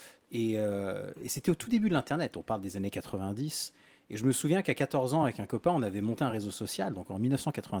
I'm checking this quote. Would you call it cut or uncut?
uncut